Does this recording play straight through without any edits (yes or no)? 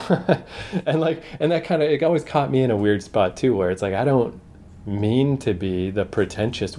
yes